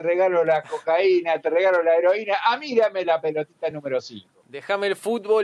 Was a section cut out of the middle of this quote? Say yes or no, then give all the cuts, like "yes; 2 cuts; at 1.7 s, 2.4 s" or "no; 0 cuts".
no; 0 cuts